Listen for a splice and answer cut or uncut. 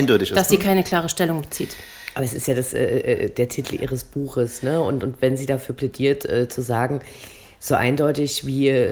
uncut